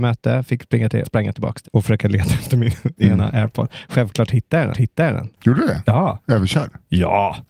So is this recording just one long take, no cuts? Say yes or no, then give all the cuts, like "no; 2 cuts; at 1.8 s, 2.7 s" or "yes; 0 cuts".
no; 3 cuts; at 1.0 s, 1.6 s, 4.7 s